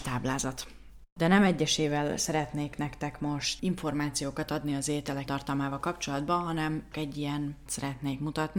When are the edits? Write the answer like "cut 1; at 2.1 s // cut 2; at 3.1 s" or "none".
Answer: cut 1; at 3.6 s // cut 2; at 5.3 s // cut 3; at 6.9 s // cut 4; at 7.7 s